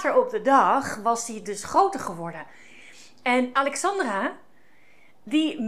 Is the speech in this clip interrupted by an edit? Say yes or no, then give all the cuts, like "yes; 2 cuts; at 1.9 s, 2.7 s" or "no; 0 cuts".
no; 0 cuts